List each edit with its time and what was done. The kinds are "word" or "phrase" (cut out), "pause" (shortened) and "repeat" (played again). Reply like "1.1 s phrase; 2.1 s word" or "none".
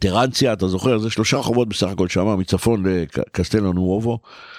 none